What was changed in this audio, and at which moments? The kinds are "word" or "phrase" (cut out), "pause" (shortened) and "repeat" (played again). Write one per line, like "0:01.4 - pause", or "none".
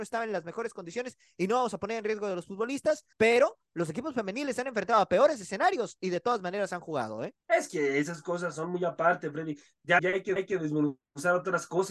0:03.1 - pause
0:07.4 - pause
0:10.0 - word
0:10.4 - repeat